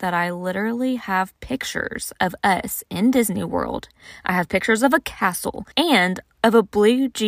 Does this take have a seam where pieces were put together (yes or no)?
yes